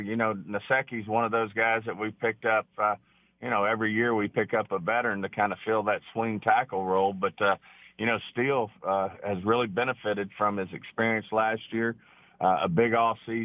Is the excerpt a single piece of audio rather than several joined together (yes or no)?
yes